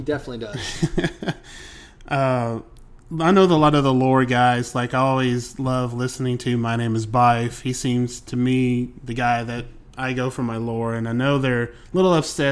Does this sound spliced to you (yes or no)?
no